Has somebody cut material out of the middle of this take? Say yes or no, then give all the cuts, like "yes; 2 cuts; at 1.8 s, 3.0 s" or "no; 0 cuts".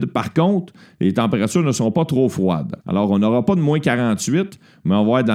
yes; 1 cut; at 2.8 s